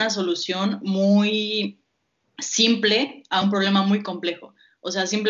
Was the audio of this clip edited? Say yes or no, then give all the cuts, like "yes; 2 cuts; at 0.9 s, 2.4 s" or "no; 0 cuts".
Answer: no; 0 cuts